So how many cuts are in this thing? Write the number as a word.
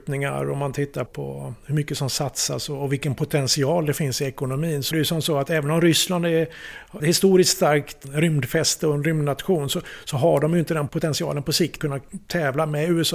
three